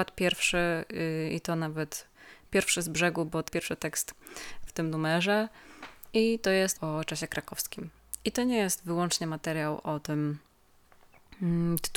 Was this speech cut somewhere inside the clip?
yes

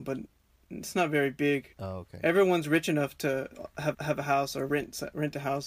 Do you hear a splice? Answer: yes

